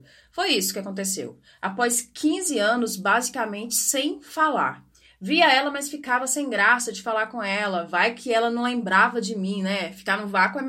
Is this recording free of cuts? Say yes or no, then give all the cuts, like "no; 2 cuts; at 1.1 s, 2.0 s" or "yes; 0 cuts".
yes; 0 cuts